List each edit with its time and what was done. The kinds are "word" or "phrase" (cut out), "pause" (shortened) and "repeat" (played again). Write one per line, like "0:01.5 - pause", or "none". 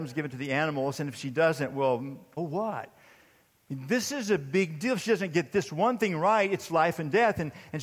0:02.4 - word